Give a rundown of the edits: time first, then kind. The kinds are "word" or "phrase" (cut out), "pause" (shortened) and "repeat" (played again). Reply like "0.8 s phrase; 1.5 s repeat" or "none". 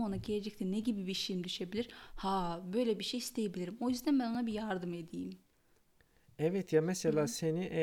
none